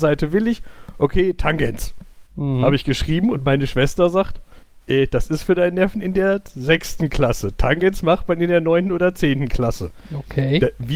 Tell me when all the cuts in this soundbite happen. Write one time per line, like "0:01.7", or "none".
0:02.3
0:04.6